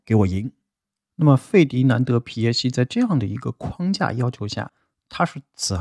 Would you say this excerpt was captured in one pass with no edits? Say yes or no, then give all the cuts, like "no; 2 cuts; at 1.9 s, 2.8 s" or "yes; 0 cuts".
yes; 0 cuts